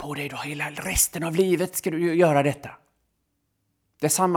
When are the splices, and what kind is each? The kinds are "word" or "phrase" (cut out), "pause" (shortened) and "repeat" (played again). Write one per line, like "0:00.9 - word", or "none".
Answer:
none